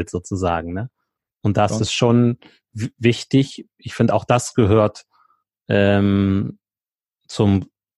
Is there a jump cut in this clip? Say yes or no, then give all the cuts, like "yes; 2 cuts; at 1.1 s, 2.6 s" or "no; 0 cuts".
no; 0 cuts